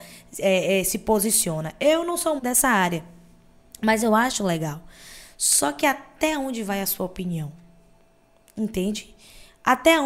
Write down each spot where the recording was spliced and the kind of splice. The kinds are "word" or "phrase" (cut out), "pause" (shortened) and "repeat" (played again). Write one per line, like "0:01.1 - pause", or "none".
0:02.4 - word

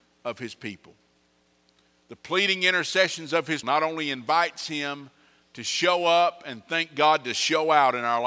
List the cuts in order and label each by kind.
0:03.6 - word

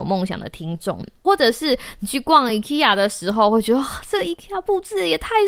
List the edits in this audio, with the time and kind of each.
none

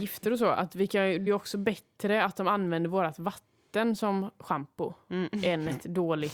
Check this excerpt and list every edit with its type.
0:01.3 - phrase

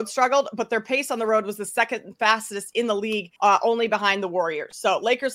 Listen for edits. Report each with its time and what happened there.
0:03.4 - pause

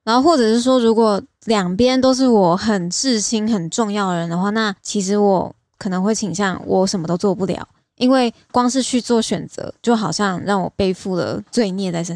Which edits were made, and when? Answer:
none

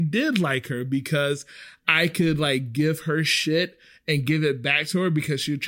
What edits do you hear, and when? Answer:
none

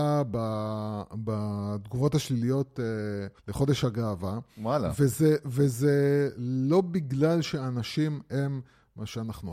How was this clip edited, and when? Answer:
0:03.4 - pause

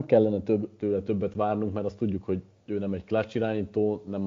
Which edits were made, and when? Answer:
none

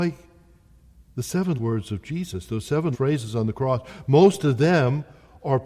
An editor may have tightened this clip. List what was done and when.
0:01.6 - word
0:02.9 - word

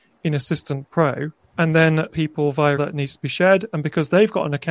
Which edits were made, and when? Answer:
0:01.4 - pause
0:02.1 - phrase
0:02.8 - word

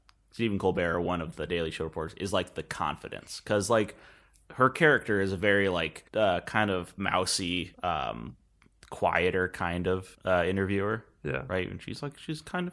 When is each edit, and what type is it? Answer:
0:06.1 - pause
0:07.7 - pause
0:10.1 - pause

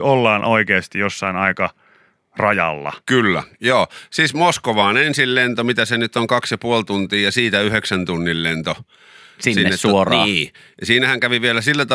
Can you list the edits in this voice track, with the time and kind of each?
none

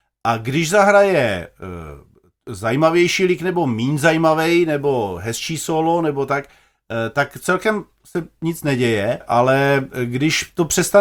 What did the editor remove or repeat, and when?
0:09.2 - word

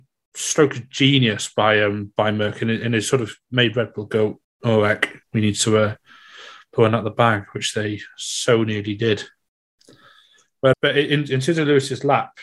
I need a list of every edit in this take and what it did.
0:04.4 - pause
0:05.2 - pause
0:10.7 - word

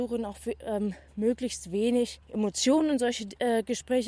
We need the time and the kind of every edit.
0:02.2 - pause

